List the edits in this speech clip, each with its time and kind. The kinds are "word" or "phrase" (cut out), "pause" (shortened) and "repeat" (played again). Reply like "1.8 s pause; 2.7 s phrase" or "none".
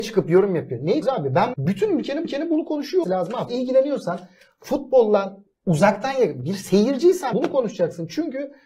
1.0 s word; 1.5 s word; 2.2 s repeat; 3.0 s word; 3.5 s word; 5.5 s pause; 7.3 s phrase